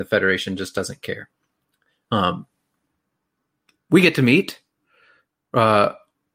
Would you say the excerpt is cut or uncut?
uncut